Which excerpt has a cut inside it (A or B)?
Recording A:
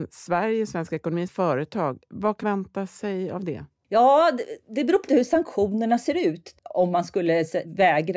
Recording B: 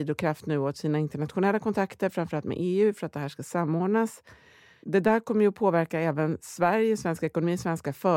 A